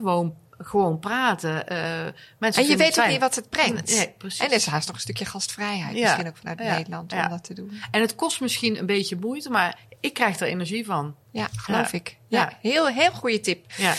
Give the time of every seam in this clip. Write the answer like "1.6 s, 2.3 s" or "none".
11.2 s